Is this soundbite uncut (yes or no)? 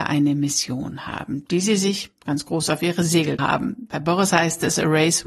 no